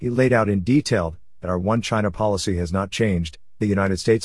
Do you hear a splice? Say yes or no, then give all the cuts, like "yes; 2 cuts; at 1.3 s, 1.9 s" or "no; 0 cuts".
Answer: no; 0 cuts